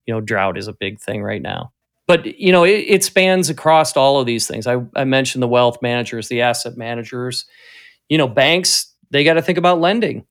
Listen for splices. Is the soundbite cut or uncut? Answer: uncut